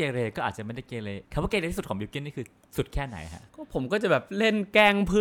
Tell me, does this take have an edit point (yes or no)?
yes